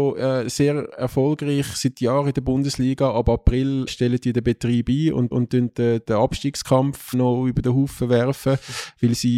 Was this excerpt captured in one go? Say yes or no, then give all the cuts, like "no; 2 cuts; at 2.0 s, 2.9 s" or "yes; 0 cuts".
no; 3 cuts; at 3.9 s, 5.3 s, 7.1 s